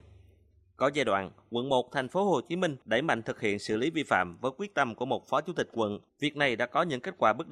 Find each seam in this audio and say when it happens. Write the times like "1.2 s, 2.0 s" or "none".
2.8 s, 6.1 s